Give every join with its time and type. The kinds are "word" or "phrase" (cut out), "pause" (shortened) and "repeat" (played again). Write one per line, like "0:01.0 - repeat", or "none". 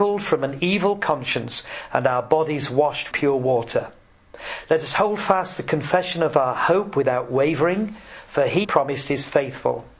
0:03.1 - word
0:08.6 - word